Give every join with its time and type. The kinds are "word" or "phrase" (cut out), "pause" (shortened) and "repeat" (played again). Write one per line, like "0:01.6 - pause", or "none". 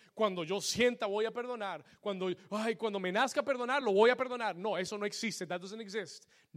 none